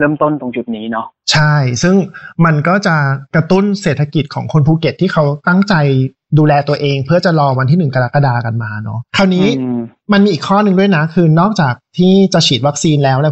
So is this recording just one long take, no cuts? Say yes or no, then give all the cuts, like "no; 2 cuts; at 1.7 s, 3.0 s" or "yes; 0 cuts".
no; 1 cut; at 9.1 s